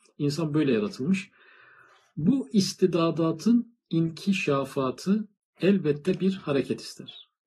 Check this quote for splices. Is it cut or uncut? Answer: uncut